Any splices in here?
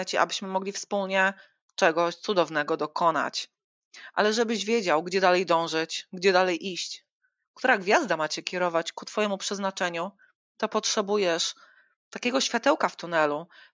no; 0 cuts

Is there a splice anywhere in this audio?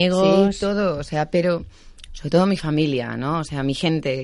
no; 0 cuts

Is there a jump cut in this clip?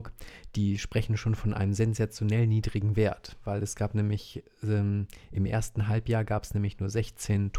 no; 0 cuts

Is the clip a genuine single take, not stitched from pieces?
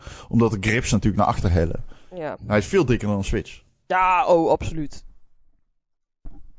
yes; 0 cuts

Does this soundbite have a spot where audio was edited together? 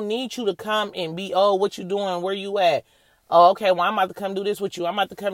no; 0 cuts

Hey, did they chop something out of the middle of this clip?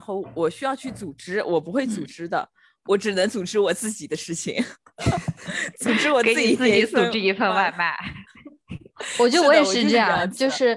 no; 0 cuts

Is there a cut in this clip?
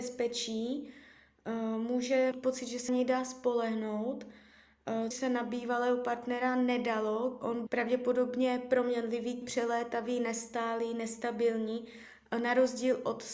yes; 5 cuts; at 2.3 s, 2.9 s, 5.1 s, 7.7 s, 9.4 s

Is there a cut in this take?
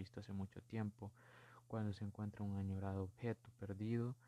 no; 0 cuts

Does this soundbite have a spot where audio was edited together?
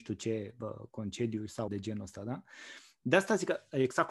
yes; 1 cut; at 1.7 s

